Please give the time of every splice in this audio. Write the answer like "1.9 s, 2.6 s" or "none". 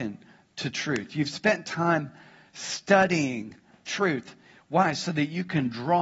none